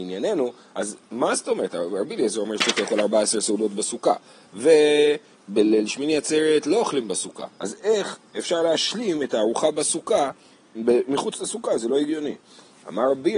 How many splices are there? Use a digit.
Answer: 2